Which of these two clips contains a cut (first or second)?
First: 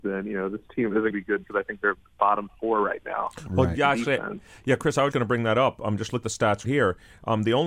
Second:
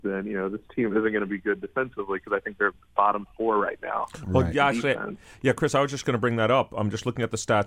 first